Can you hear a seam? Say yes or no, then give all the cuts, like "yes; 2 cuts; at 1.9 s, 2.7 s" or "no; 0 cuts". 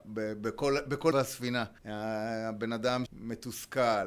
yes; 3 cuts; at 1.1 s, 1.8 s, 3.1 s